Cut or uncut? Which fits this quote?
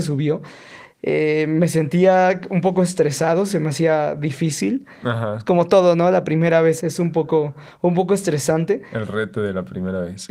cut